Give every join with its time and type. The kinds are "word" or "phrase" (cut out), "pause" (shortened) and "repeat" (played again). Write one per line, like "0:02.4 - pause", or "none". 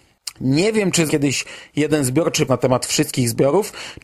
0:01.1 - word
0:02.5 - word